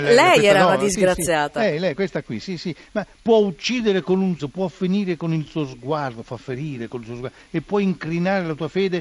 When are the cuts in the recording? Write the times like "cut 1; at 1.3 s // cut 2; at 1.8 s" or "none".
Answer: cut 1; at 4.4 s